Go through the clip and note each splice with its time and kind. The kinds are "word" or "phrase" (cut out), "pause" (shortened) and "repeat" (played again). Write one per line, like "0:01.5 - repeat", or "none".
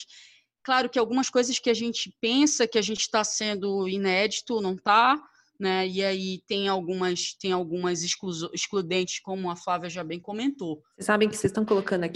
none